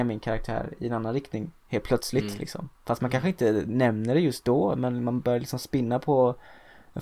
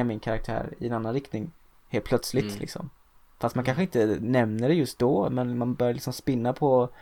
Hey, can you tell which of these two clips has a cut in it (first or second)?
first